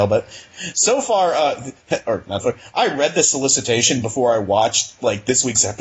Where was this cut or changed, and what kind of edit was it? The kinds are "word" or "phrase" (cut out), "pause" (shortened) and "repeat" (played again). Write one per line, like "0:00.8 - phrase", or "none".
0:02.4 - word